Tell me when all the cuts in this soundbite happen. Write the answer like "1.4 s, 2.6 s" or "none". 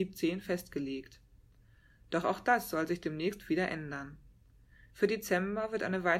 none